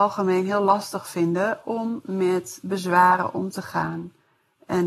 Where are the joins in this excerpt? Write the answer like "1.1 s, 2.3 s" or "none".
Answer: none